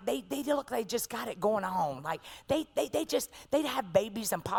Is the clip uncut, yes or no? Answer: yes